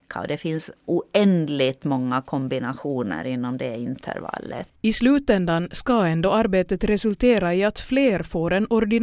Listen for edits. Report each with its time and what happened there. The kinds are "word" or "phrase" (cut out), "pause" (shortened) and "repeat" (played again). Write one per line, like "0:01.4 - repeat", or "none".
0:04.8 - pause